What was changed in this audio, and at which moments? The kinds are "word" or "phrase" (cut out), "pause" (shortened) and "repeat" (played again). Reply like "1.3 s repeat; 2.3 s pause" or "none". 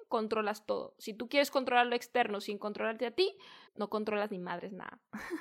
3.7 s pause